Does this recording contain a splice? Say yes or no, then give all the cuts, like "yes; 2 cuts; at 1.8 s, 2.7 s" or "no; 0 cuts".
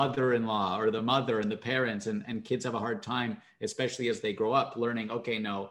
no; 0 cuts